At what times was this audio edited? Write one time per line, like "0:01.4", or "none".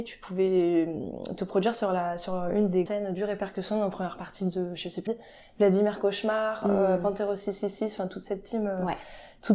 0:02.9
0:05.1